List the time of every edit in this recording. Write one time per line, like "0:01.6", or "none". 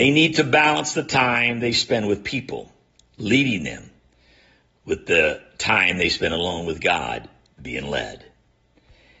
none